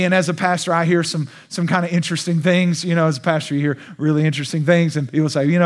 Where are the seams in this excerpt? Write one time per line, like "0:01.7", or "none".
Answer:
none